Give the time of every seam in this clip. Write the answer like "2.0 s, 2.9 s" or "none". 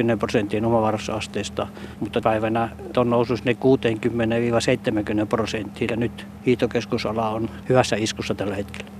2.2 s, 2.9 s, 5.9 s, 7.6 s